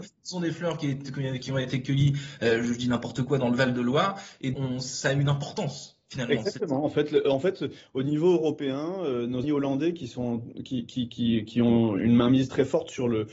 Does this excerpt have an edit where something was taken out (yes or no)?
yes